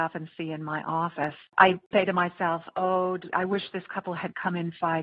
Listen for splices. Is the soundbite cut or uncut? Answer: cut